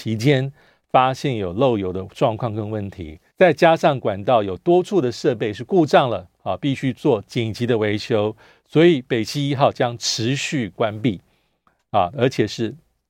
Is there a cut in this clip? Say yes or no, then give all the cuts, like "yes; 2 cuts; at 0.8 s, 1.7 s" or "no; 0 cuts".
yes; 1 cut; at 3.3 s